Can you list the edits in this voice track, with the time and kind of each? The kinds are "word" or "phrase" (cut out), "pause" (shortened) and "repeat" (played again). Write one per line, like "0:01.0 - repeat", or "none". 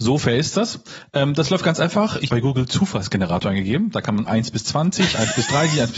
0:02.3 - word
0:04.3 - word

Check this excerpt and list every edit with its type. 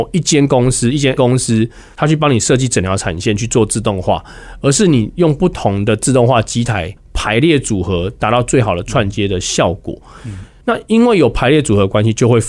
0:01.2 - word

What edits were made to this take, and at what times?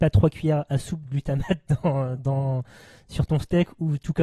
0:01.1 - word
0:02.2 - word

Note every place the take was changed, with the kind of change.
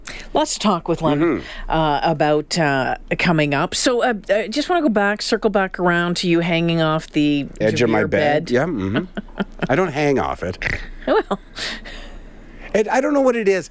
0:07.6 - word

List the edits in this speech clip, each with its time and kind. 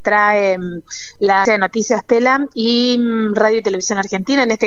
0:01.4 - word

